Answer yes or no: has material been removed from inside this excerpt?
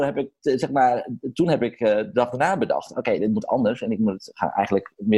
no